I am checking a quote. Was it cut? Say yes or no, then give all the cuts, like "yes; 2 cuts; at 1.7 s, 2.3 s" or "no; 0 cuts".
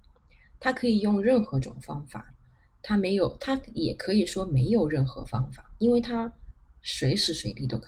no; 0 cuts